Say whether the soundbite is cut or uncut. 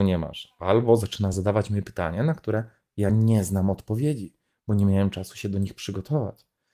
uncut